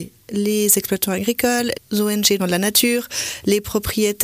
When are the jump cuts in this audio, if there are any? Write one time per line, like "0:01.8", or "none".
0:01.7
0:02.4